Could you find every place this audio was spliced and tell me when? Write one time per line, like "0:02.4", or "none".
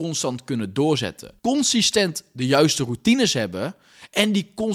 0:01.4